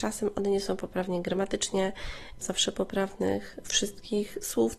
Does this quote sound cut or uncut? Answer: cut